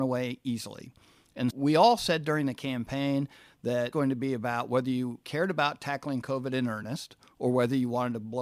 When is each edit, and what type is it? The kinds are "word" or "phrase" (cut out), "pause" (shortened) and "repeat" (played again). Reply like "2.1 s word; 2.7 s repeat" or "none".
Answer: 1.5 s word; 3.9 s phrase